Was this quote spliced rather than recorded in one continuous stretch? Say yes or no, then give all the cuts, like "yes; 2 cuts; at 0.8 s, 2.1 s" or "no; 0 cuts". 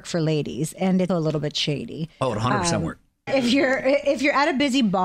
yes; 2 cuts; at 1.1 s, 3.3 s